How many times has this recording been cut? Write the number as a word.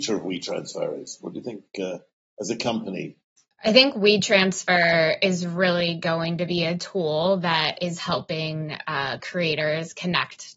zero